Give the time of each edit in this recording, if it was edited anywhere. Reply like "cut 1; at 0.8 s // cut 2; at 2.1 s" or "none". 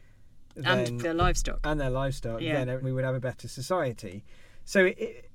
cut 1; at 1.0 s // cut 2; at 2.8 s